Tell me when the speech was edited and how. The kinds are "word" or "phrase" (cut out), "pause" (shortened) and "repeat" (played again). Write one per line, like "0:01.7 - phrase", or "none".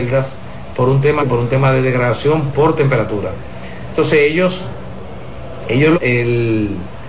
0:01.2 - phrase
0:05.9 - word